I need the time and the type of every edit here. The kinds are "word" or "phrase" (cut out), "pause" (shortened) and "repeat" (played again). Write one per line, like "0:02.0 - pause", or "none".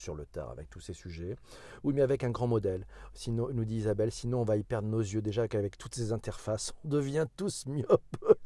0:06.8 - word